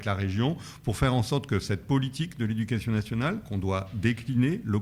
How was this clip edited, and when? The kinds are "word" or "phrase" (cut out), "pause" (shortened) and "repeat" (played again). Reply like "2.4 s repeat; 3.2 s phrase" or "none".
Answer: none